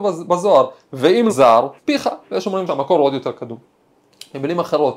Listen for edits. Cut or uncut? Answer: cut